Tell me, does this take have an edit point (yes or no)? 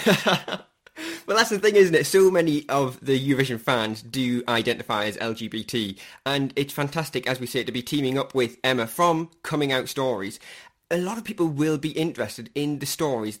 no